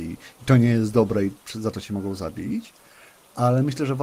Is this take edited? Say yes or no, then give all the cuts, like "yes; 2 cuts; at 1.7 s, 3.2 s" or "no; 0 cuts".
no; 0 cuts